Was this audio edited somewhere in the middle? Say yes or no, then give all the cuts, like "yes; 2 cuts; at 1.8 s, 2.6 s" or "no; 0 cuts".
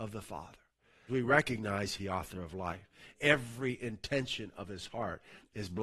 yes; 3 cuts; at 1.1 s, 2.0 s, 3.1 s